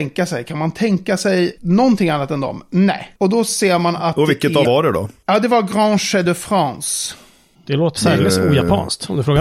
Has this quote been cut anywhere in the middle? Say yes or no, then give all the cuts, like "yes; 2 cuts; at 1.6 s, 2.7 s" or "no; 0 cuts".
yes; 4 cuts; at 1.6 s, 3.2 s, 4.6 s, 8.0 s